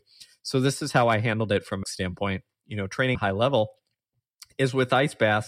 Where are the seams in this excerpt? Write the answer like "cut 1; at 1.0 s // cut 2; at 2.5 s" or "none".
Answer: cut 1; at 1.8 s // cut 2; at 3.1 s